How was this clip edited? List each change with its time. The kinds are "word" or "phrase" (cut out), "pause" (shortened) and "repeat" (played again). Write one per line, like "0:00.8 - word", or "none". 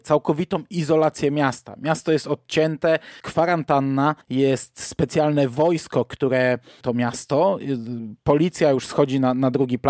0:03.2 - word
0:04.2 - pause
0:06.8 - phrase